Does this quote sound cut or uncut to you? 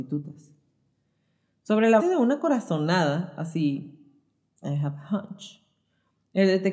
cut